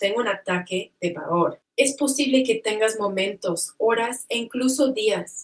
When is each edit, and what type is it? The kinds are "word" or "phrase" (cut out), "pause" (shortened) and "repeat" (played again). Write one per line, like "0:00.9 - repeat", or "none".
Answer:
0:01.7 - pause

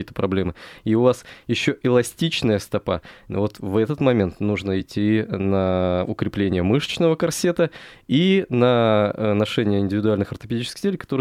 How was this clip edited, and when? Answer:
none

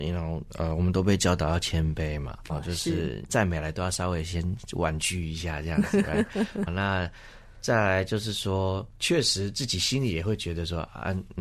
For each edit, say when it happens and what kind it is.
0:02.5 - word
0:06.7 - word

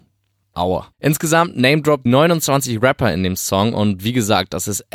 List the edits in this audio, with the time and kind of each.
0:00.9 - pause
0:02.1 - word

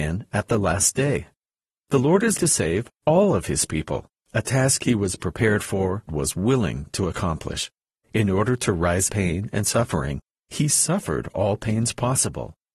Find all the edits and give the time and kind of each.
0:02.4 - word
0:05.2 - word
0:06.1 - word
0:09.1 - word

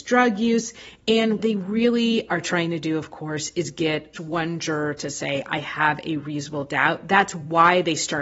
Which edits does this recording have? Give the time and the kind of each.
0:01.4 - word
0:04.1 - phrase

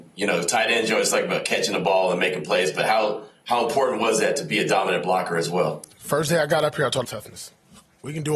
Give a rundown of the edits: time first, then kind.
0:05.9 - pause
0:07.0 - phrase

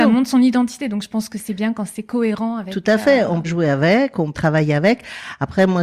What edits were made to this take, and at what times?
0:03.4 - word
0:04.3 - word

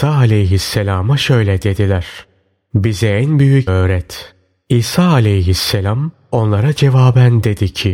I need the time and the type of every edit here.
0:03.7 - word

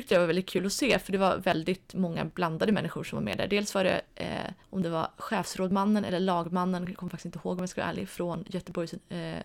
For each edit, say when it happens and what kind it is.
0:04.6 - pause

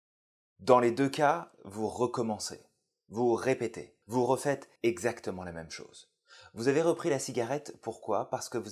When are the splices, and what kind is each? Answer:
0:04.0 - pause
0:04.8 - pause

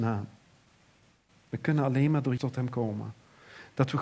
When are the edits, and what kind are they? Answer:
0:02.4 - word

